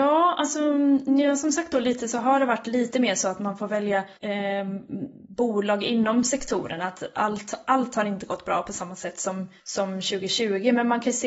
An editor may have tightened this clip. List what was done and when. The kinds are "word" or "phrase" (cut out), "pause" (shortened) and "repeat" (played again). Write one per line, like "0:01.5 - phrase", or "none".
0:04.2 - pause
0:09.6 - pause